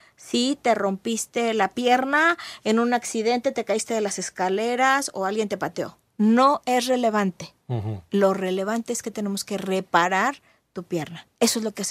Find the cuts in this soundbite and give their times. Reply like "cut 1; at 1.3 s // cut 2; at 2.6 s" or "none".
none